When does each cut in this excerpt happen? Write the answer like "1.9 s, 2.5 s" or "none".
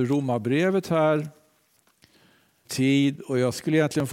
2.7 s